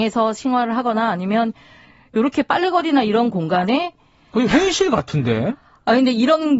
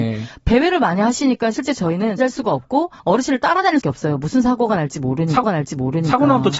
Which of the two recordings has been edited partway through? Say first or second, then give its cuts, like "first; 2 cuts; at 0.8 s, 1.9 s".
second; 4 cuts; at 2.2 s, 3.0 s, 3.8 s, 5.4 s